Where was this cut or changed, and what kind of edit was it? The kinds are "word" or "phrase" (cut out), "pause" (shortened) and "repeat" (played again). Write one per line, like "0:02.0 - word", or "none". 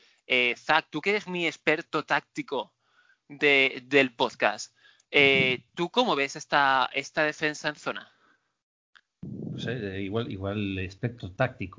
none